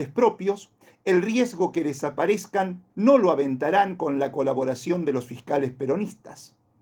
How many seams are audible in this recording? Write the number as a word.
one